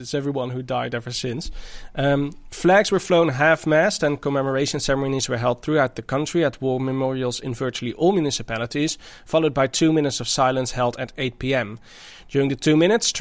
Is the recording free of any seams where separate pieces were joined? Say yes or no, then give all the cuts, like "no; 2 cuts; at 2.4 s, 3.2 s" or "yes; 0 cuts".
yes; 0 cuts